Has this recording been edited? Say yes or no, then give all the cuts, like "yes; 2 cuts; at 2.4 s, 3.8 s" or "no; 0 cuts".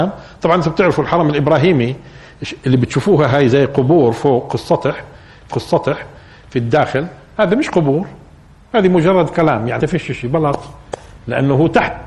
yes; 2 cuts; at 5.5 s, 9.8 s